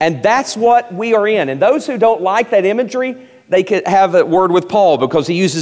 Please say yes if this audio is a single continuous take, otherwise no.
yes